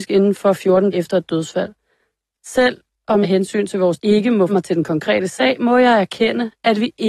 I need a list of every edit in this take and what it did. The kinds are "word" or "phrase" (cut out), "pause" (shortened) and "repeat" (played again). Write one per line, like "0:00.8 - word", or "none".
0:00.9 - word
0:03.2 - word
0:04.0 - word
0:04.5 - word